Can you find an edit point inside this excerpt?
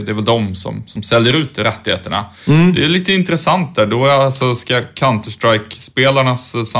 no; 0 cuts

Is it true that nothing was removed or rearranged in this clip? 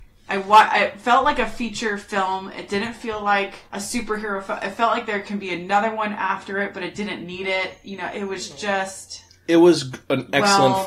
no; 2 cuts; at 3.7 s, 9.3 s

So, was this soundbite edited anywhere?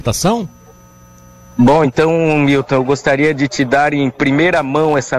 no; 0 cuts

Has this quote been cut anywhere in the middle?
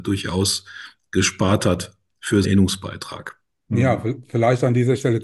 yes; 1 cut; at 2.4 s

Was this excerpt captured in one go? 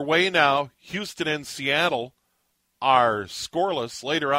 yes; 0 cuts

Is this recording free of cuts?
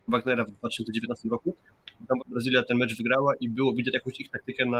no; 1 cut; at 2.2 s

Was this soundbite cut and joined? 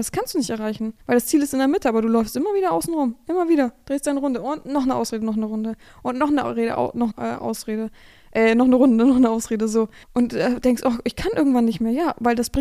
yes; 3 cuts; at 1.0 s, 7.1 s, 10.0 s

